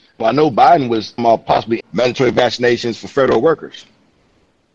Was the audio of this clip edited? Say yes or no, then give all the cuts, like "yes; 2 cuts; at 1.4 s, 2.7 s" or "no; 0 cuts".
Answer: yes; 2 cuts; at 1.2 s, 1.8 s